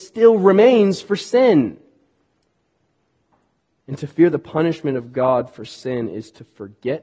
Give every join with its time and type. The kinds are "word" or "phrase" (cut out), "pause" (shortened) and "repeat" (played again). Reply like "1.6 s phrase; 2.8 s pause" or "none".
none